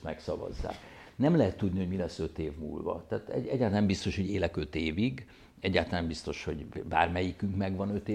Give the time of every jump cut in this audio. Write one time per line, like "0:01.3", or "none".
none